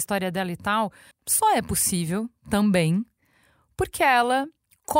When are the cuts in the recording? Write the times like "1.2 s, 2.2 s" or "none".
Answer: 1.1 s